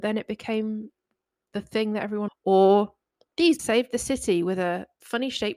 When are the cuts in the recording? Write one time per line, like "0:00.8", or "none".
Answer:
0:02.3
0:03.6